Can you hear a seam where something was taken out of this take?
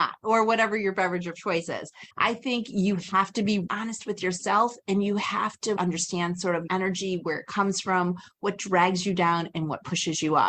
yes; 4 cuts; at 2.1 s, 3.7 s, 5.8 s, 6.7 s

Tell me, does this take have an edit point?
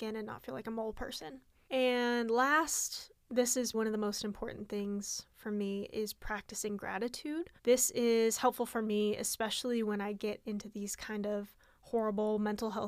yes; 2 cuts; at 3.7 s, 7.6 s

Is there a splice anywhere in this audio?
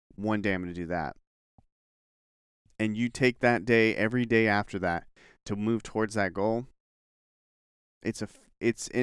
no; 0 cuts

